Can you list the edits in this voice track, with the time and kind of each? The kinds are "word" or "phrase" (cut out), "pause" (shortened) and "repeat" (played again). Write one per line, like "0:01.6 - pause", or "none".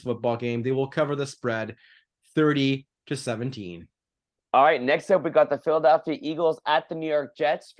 none